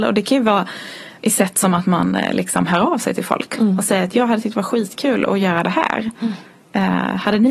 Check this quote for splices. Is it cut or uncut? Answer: uncut